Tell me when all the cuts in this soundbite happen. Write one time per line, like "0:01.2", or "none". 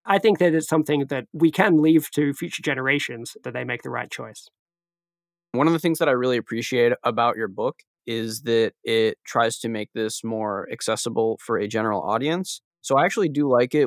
0:03.4